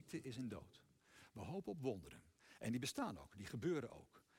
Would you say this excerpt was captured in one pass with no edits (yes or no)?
yes